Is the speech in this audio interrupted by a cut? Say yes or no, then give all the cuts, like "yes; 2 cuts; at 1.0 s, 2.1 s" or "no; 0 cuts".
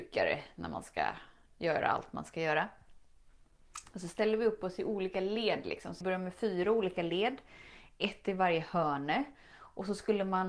yes; 1 cut; at 6.0 s